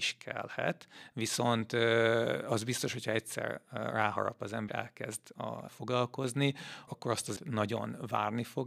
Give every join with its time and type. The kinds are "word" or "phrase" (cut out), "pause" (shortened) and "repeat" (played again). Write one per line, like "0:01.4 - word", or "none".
0:04.7 - word
0:05.7 - word
0:06.9 - word
0:07.4 - word